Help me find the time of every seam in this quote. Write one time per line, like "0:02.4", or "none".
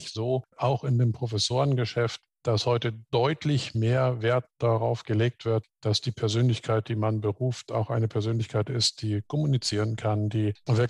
none